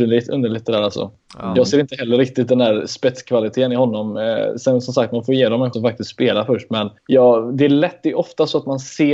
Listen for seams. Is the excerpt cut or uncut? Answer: cut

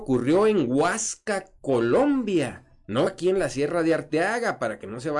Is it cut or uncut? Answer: cut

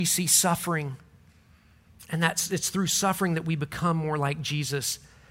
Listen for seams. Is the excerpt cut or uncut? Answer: uncut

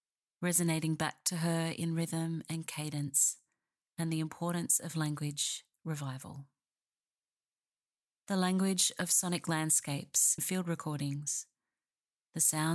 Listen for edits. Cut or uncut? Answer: cut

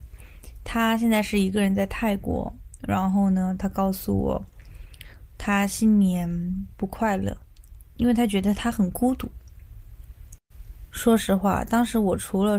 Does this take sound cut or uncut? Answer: cut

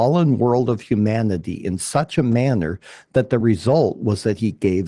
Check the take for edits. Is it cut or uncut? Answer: uncut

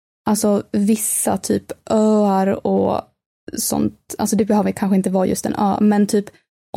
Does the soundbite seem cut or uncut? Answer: uncut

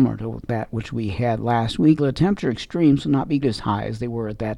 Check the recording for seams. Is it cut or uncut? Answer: cut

